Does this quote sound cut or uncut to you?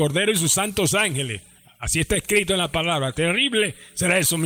uncut